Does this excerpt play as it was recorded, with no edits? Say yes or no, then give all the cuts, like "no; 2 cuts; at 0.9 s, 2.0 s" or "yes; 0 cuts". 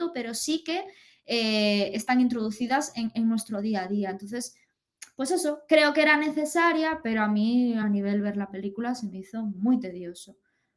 yes; 0 cuts